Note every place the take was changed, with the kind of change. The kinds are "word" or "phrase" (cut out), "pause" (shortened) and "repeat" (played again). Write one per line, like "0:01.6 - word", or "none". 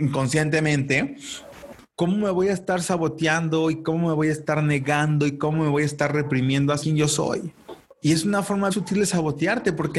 0:06.8 - word
0:07.8 - pause
0:08.7 - word